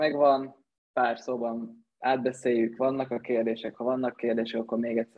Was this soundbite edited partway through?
no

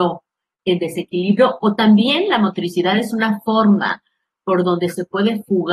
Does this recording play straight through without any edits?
yes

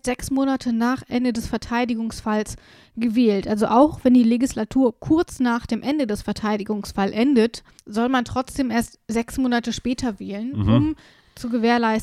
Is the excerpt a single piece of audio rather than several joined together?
no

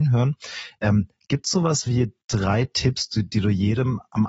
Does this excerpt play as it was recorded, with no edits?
yes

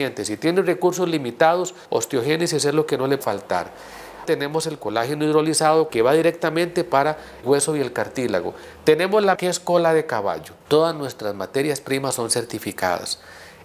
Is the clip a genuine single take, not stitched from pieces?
no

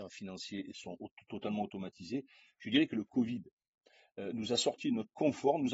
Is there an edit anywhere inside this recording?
no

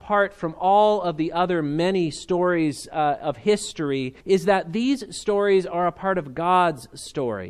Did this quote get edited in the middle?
yes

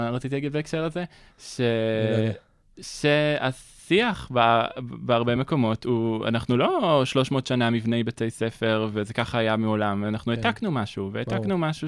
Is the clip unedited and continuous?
yes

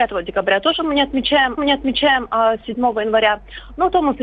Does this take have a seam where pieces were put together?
yes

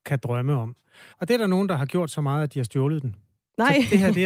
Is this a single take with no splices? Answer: no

